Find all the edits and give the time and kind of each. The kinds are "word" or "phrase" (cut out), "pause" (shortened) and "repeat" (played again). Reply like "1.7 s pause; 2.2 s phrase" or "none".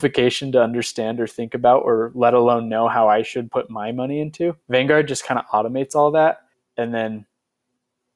4.6 s pause; 6.5 s pause